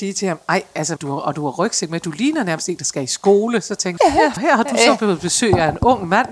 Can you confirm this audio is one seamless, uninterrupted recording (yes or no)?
no